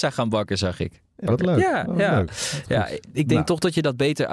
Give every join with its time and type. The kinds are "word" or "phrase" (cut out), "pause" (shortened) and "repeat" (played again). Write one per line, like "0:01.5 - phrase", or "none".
0:01.3 - word